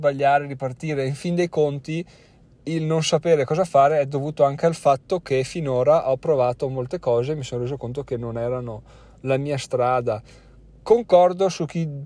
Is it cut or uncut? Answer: uncut